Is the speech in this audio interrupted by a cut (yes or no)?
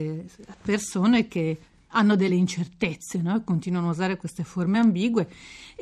no